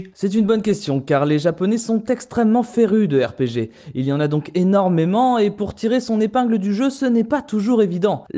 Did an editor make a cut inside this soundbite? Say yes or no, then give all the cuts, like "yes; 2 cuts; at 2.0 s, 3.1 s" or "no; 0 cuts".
no; 0 cuts